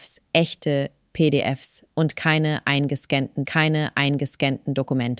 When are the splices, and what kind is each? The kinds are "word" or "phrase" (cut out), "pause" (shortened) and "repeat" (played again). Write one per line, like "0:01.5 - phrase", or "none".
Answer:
0:01.9 - word
0:03.5 - repeat

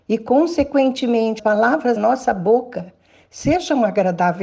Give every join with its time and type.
0:01.4 - word
0:02.0 - word

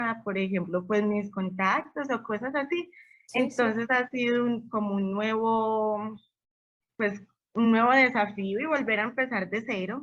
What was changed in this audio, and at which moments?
none

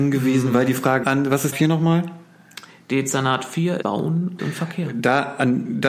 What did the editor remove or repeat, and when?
0:01.0 - word
0:01.5 - word
0:03.8 - word
0:04.4 - word

